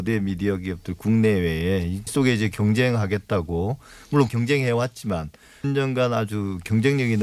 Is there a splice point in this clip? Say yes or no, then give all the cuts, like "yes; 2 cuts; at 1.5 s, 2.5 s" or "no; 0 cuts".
yes; 3 cuts; at 2.1 s, 4.3 s, 5.6 s